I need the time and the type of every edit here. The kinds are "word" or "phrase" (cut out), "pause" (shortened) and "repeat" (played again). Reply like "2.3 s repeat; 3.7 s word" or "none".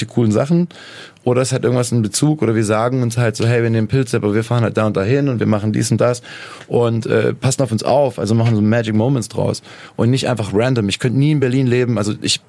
none